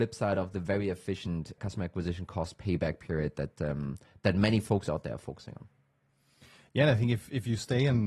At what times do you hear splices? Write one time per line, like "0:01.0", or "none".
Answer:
none